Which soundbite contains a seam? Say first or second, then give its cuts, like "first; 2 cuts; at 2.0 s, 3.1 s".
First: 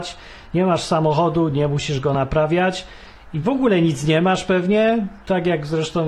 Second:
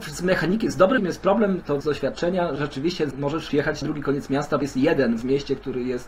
second; 7 cuts; at 1.0 s, 1.8 s, 2.6 s, 3.1 s, 3.5 s, 3.8 s, 4.6 s